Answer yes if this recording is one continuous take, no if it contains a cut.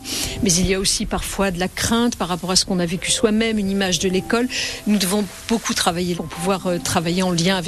no